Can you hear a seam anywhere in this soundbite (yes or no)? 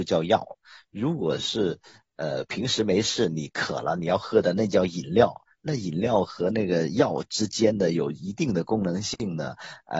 no